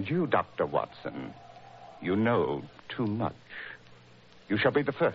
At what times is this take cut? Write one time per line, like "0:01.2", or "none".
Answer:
0:02.8